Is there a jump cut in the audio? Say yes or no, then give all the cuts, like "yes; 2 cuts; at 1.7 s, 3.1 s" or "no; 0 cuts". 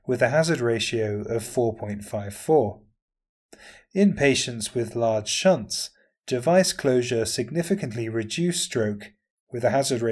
no; 0 cuts